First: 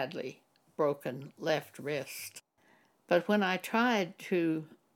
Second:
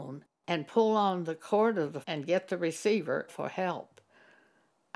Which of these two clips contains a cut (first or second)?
second